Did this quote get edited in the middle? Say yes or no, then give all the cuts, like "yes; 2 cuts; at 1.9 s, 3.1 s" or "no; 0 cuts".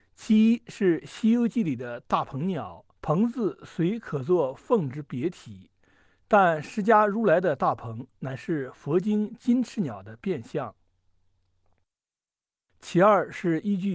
yes; 1 cut; at 2.9 s